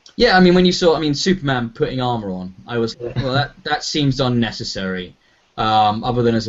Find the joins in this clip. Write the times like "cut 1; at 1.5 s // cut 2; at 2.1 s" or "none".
cut 1; at 2.9 s